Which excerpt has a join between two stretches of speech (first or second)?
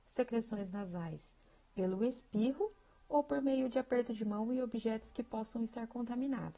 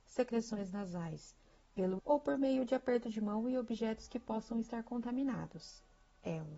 second